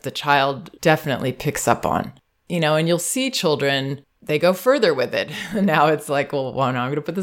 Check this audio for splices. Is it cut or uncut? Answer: uncut